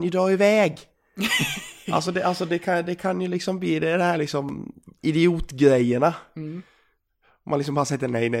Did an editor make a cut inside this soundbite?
no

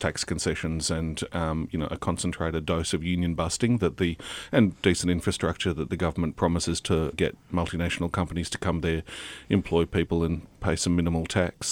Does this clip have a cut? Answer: yes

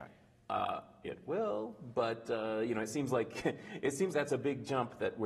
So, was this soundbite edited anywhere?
yes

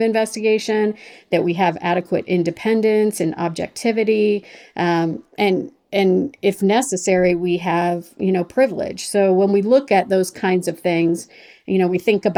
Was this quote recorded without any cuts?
yes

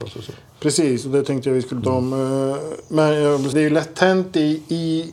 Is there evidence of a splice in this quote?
yes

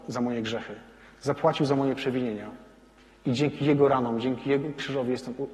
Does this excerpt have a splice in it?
no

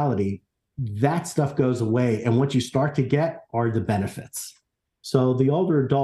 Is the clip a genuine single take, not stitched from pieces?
yes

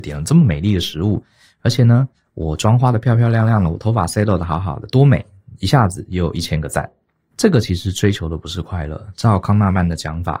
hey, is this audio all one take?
yes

